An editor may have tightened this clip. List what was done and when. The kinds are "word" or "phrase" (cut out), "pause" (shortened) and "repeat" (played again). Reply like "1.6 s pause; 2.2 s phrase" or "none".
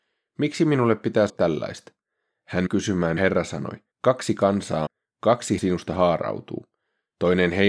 1.3 s word; 2.7 s word; 3.2 s phrase; 3.9 s pause; 4.9 s phrase; 5.6 s word